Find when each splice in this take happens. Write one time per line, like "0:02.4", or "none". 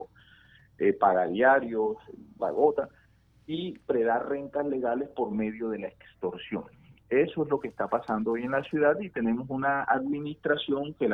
0:02.4